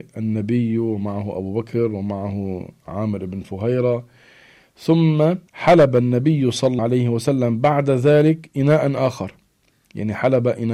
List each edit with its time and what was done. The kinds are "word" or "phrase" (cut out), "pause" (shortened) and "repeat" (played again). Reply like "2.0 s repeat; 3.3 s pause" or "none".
5.5 s pause; 6.8 s word